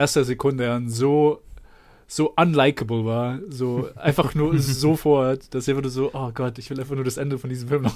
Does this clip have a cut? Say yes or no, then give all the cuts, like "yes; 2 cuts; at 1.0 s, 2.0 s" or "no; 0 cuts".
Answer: no; 0 cuts